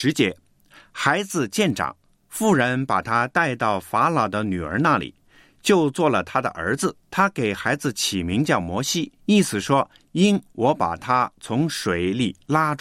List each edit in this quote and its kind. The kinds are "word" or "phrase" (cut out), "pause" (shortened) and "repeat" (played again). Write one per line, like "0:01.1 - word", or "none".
0:07.0 - pause